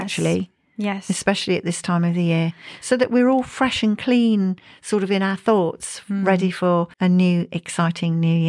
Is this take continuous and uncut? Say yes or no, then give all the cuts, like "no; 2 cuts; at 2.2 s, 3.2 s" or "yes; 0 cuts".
no; 1 cut; at 6.9 s